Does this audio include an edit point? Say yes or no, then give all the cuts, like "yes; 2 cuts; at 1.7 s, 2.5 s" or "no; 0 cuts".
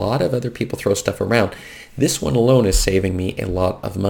no; 0 cuts